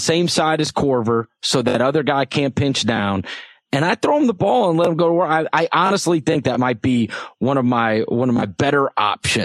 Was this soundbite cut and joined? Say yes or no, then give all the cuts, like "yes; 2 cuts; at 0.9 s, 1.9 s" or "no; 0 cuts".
no; 0 cuts